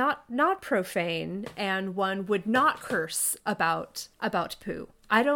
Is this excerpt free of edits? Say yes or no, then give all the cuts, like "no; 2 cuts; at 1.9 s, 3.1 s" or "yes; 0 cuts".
no; 1 cut; at 4.1 s